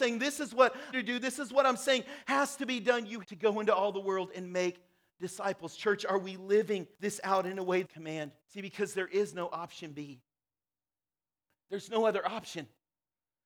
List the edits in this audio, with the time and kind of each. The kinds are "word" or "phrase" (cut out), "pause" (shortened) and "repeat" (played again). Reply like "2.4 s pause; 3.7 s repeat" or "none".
0.9 s phrase; 3.2 s word; 6.9 s pause; 7.8 s phrase; 8.4 s pause